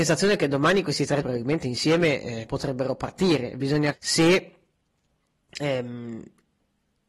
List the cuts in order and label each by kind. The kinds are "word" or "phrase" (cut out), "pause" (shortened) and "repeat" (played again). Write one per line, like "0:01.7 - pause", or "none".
0:01.2 - word
0:02.5 - word
0:03.9 - word